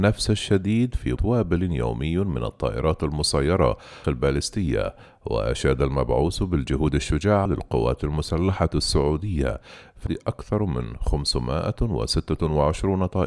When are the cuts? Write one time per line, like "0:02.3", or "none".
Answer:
0:01.2
0:04.0
0:07.5
0:10.1

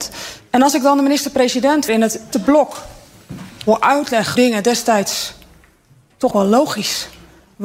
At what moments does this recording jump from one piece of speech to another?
0:01.9
0:02.3
0:04.4
0:06.3

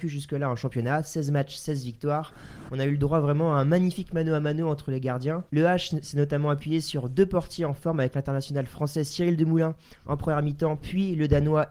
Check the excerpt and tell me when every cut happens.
0:05.5

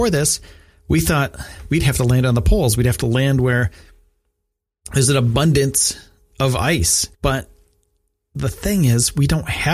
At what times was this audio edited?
0:07.1

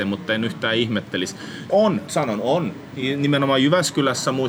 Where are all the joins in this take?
0:01.7
0:02.1

